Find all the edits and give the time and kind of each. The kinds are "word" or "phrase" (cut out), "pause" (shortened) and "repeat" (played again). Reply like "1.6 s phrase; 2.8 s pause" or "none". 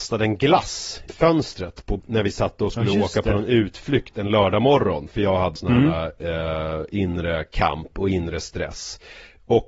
1.1 s word; 2.0 s word; 5.6 s word

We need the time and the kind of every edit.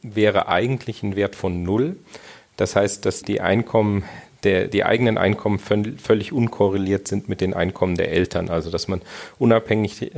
3.2 s word

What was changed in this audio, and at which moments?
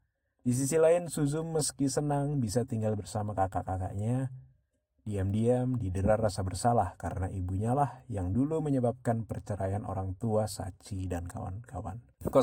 none

